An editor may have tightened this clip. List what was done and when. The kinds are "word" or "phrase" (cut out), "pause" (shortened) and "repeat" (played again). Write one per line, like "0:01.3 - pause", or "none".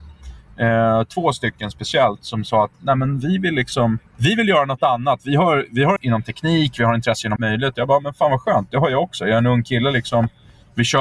0:04.1 - pause
0:06.0 - word
0:07.4 - word